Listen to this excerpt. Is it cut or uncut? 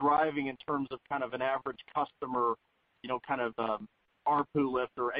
uncut